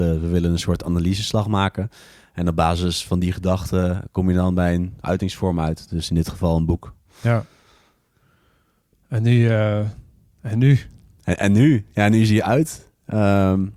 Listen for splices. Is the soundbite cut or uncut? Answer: uncut